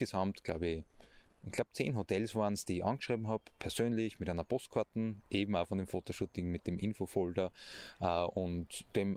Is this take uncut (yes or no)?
yes